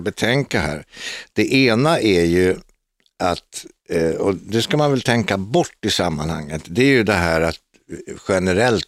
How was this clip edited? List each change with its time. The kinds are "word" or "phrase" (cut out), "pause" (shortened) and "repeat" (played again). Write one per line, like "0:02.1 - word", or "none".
none